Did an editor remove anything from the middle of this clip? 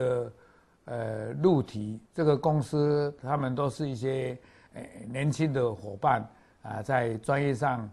yes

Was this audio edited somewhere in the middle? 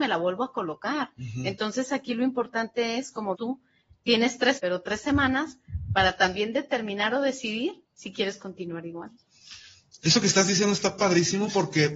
yes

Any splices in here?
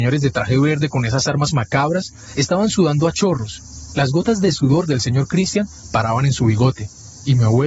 no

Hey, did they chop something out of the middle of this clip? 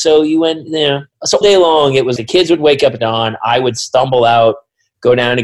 yes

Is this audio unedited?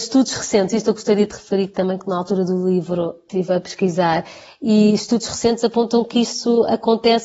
yes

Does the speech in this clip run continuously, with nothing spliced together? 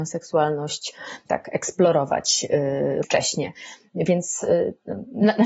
no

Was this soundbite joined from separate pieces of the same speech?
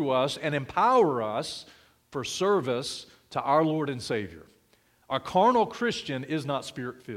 no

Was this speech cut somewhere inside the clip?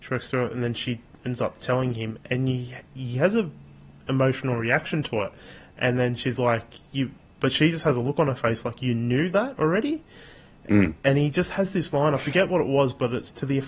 no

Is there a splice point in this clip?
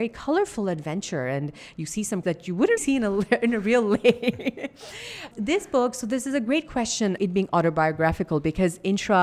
yes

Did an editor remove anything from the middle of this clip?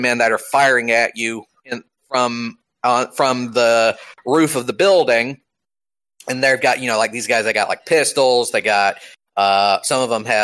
no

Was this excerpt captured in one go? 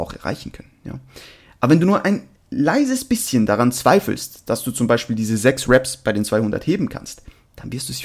yes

